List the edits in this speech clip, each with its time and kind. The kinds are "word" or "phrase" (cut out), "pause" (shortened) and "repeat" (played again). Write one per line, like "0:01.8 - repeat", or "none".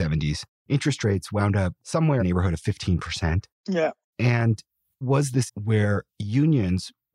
0:02.2 - word
0:05.0 - word
0:05.5 - word